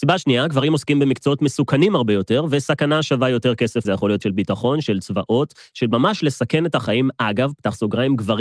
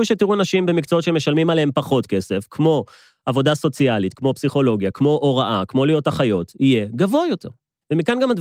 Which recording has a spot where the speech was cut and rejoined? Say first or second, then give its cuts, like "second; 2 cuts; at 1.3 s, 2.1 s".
first; 2 cuts; at 3.8 s, 4.2 s